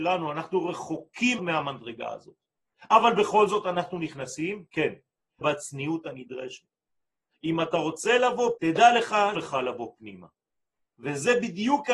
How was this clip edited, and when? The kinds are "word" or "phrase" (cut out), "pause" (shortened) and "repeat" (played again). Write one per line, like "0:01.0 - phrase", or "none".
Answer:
0:01.4 - word
0:05.4 - word
0:08.6 - word
0:09.3 - word